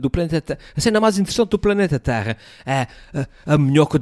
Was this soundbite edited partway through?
no; 0 cuts

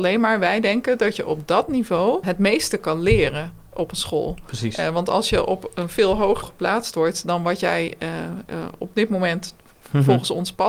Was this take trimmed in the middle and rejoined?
yes; 2 cuts; at 2.2 s, 6.4 s

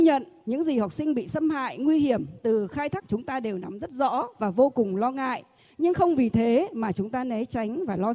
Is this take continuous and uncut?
no; 1 cut; at 3.0 s

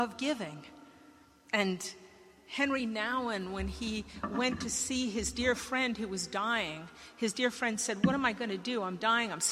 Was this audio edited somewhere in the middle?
no; 0 cuts

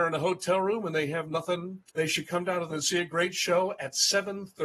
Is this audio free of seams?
no; 2 cuts; at 1.9 s, 2.7 s

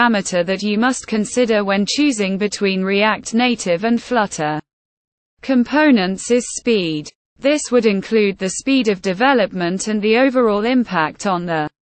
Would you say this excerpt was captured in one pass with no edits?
yes; 0 cuts

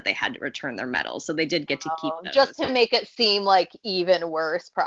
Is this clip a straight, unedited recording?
yes; 0 cuts

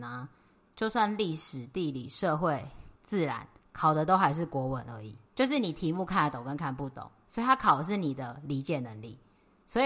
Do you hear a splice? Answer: yes; 3 cuts; at 3.0 s, 3.6 s, 5.3 s

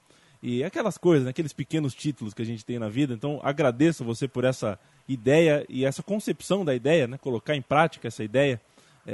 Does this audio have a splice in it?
no; 0 cuts

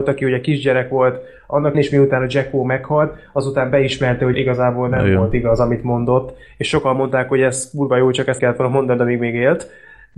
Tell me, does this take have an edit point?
yes; 3 cuts; at 1.7 s, 4.3 s, 8.4 s

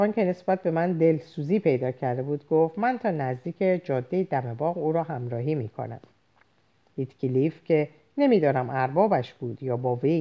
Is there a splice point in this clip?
no; 0 cuts

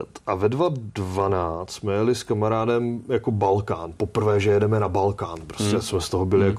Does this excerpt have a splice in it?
no; 0 cuts

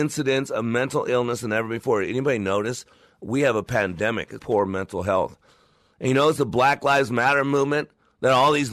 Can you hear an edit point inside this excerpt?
yes; 1 cut; at 4.4 s

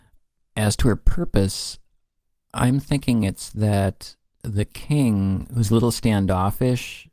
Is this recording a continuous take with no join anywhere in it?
yes; 0 cuts

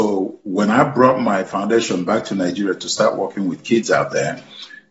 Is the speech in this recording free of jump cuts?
yes; 0 cuts

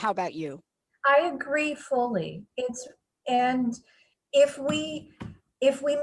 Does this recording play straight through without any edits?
yes; 0 cuts

